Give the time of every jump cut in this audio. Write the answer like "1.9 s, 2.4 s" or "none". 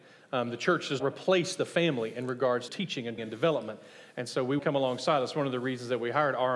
1.0 s, 2.7 s, 3.2 s, 4.6 s